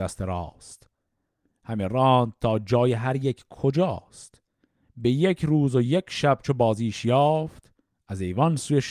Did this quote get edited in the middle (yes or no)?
no